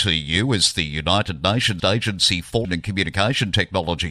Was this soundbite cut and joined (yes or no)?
yes